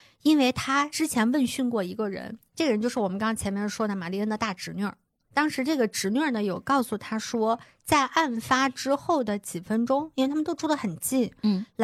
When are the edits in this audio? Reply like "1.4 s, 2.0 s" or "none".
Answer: none